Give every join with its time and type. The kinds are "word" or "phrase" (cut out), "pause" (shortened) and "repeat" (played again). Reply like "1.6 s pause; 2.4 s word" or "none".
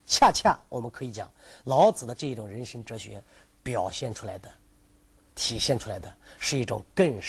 none